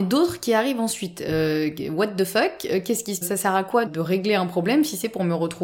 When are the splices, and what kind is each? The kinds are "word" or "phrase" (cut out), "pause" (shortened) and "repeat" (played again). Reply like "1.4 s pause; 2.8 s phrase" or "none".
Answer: 3.2 s word; 3.9 s word